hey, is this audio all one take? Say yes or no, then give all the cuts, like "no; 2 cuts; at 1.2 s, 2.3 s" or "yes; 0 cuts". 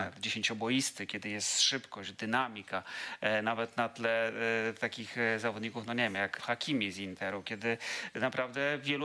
no; 1 cut; at 6.4 s